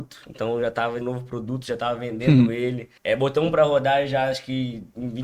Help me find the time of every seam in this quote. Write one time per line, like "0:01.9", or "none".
0:01.0
0:03.0